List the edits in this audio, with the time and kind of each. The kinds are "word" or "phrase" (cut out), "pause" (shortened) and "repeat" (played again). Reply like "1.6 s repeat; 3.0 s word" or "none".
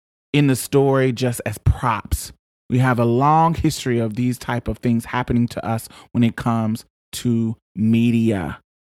none